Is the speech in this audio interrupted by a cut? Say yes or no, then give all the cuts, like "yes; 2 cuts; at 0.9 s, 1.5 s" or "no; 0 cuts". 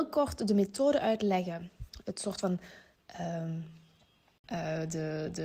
no; 0 cuts